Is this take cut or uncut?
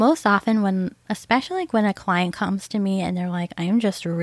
uncut